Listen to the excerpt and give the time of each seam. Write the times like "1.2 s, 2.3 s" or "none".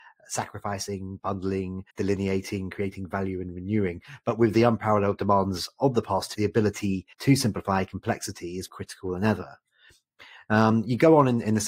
1.9 s, 6.3 s, 7.1 s, 8.7 s